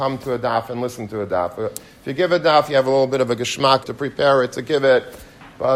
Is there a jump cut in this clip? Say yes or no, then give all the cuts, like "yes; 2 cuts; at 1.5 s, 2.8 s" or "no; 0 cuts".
yes; 1 cut; at 3.8 s